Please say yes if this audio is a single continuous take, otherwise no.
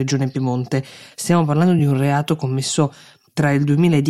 yes